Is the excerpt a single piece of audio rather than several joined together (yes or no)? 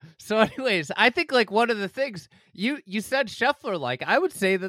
yes